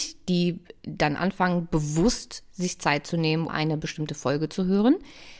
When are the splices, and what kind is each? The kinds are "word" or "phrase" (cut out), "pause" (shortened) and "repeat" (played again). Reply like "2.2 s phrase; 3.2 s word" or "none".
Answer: 3.5 s word